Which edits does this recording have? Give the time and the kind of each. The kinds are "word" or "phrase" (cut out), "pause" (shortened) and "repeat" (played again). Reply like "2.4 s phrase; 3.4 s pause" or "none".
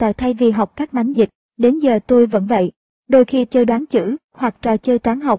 1.1 s word; 3.5 s word